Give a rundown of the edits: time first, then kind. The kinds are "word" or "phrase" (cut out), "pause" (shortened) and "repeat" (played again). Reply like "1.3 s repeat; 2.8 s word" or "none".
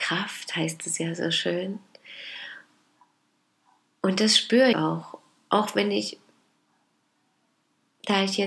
4.7 s word